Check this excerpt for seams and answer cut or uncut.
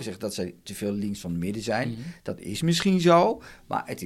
uncut